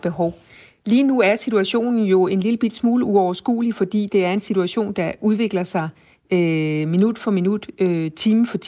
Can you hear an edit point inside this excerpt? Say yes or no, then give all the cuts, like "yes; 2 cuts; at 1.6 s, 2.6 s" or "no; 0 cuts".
no; 0 cuts